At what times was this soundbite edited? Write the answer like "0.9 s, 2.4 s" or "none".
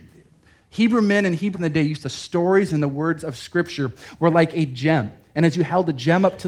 1.5 s, 2.0 s